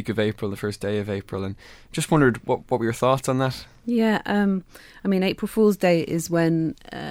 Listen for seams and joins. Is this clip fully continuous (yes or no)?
yes